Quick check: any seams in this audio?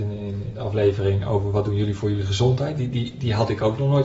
no; 0 cuts

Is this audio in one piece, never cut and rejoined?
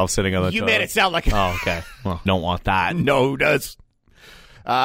no; 1 cut; at 2.3 s

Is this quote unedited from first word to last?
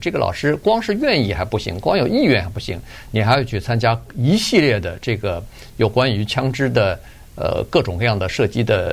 yes; 0 cuts

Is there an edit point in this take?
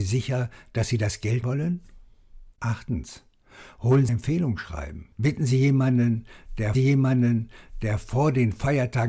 yes; 5 cuts; at 1.4 s, 2.5 s, 4.1 s, 5.1 s, 6.7 s

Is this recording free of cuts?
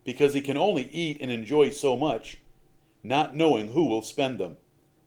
yes; 0 cuts

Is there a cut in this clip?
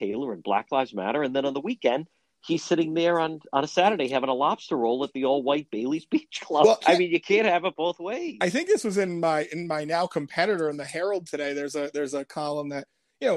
yes; 1 cut; at 6.8 s

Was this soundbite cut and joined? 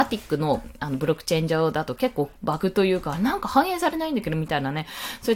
yes; 1 cut; at 2.4 s

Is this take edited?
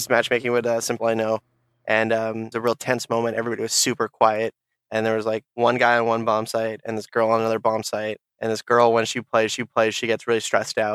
yes; 4 cuts; at 1.0 s, 2.5 s, 5.5 s, 9.5 s

